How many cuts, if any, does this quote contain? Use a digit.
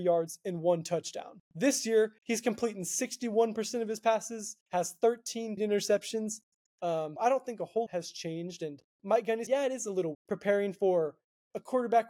9